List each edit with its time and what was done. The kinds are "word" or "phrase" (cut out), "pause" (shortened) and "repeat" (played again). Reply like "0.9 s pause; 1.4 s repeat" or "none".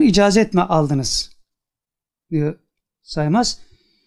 none